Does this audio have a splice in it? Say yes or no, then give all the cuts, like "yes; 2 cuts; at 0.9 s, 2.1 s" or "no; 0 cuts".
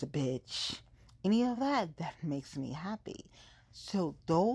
no; 0 cuts